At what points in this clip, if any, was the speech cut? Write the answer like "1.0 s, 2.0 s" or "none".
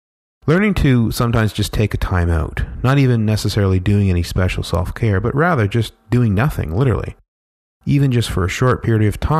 none